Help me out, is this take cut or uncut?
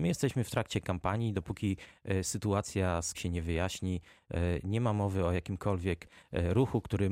cut